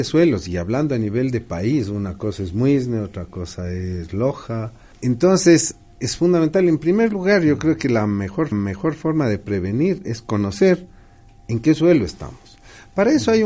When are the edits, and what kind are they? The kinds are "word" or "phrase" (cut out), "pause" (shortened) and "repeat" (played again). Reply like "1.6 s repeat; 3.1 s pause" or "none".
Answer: 4.9 s pause; 8.5 s repeat

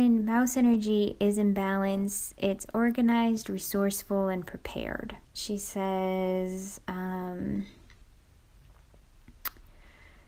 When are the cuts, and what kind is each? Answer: 5.3 s pause

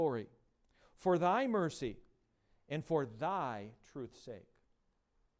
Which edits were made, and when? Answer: none

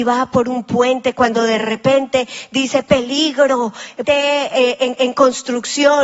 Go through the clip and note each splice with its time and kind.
4.0 s word; 5.0 s repeat

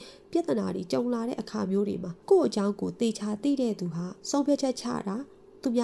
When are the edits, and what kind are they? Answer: 2.2 s pause; 4.2 s pause

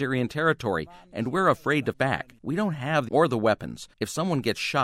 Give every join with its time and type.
1.9 s word; 2.4 s pause; 3.1 s word; 3.9 s pause

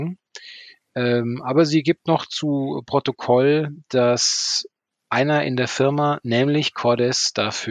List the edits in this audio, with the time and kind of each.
none

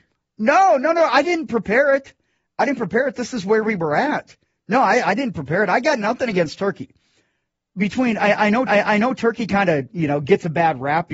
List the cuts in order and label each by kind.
8.7 s repeat

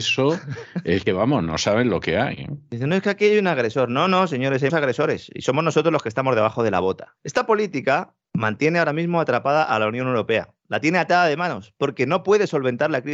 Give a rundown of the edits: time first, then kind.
1.1 s phrase; 4.7 s word; 7.2 s pause; 8.2 s pause

